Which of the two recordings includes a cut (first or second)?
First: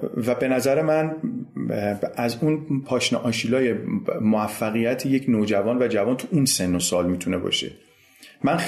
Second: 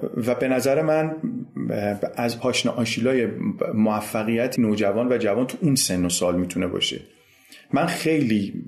second